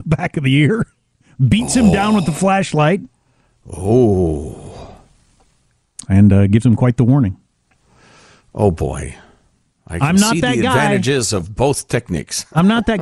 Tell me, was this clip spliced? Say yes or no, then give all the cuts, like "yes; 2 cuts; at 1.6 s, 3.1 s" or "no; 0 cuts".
no; 0 cuts